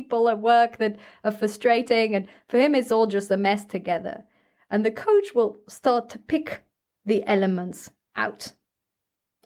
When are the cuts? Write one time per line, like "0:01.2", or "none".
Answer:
none

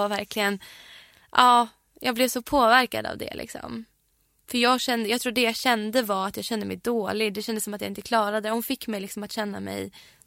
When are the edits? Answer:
none

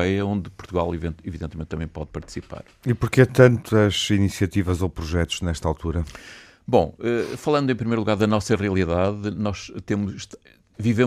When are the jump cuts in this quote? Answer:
none

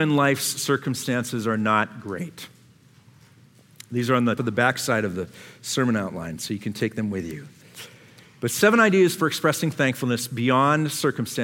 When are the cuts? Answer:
0:04.4

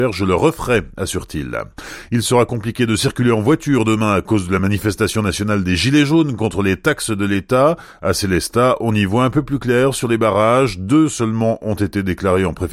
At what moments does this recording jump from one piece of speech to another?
none

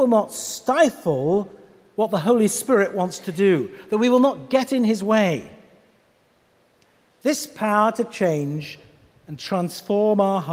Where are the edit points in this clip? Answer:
none

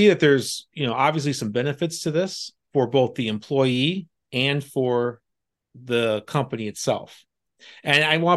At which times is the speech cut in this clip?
none

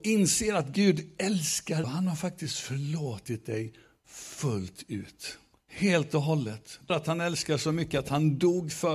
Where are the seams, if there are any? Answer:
0:01.8
0:05.5
0:06.9

